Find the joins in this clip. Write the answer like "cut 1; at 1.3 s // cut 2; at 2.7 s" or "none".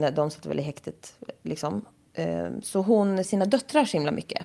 cut 1; at 3.2 s